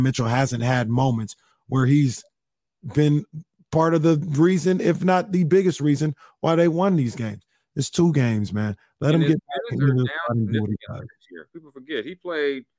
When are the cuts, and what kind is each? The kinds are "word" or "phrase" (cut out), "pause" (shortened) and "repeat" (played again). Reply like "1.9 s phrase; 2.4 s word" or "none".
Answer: none